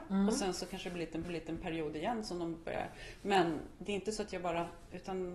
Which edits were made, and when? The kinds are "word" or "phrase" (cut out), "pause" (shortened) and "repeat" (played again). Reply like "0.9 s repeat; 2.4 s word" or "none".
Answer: 1.2 s repeat